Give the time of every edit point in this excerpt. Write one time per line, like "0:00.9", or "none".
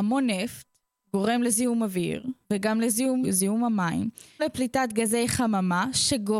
0:02.4
0:03.2
0:04.4